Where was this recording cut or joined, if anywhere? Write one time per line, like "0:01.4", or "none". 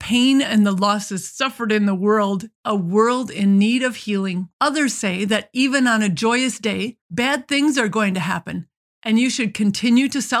0:02.5
0:04.5
0:07.0